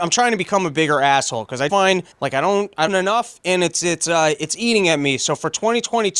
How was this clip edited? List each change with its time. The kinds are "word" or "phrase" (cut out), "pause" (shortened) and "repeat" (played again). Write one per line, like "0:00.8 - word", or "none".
0:01.7 - word
0:02.1 - pause
0:02.9 - phrase

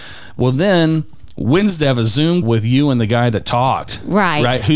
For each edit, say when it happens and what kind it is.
0:01.9 - word
0:02.4 - word

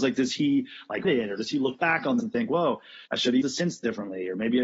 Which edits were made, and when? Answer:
0:01.0 - word
0:02.2 - word
0:03.1 - pause
0:03.4 - word

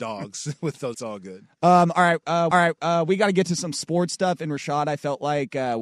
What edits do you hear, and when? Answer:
0:00.9 - phrase
0:02.5 - repeat

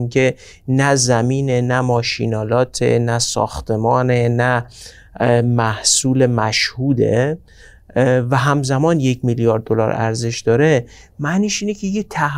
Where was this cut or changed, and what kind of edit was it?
none

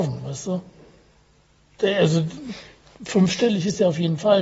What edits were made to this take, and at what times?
none

